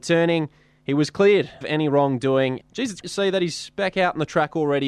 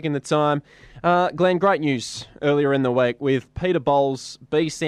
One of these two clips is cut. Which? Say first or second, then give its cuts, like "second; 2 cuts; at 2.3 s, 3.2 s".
first; 3 cuts; at 1.6 s, 2.6 s, 3.0 s